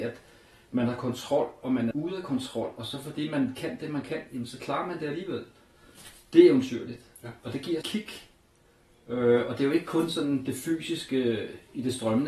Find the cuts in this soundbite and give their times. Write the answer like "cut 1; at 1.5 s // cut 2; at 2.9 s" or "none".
cut 1; at 1.9 s // cut 2; at 7.8 s

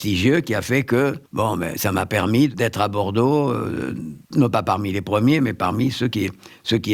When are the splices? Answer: cut 1; at 1.3 s // cut 2; at 4.2 s

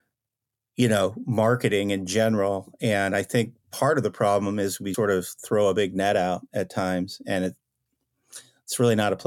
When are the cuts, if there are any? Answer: cut 1; at 4.9 s

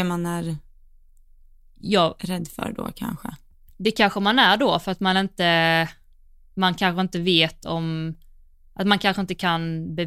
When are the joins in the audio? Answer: none

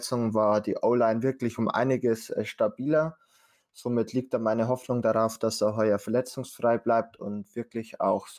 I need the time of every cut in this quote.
none

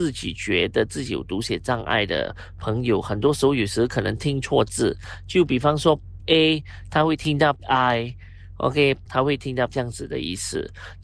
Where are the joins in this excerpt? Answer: cut 1; at 6.2 s // cut 2; at 7.6 s // cut 3; at 9.1 s // cut 4; at 9.7 s

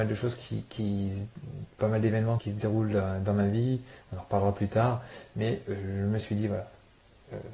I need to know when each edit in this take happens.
cut 1; at 2.4 s

